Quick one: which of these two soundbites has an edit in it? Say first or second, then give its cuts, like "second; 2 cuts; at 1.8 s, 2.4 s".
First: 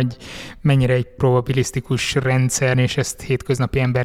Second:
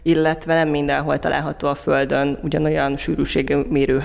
first; 1 cut; at 2.7 s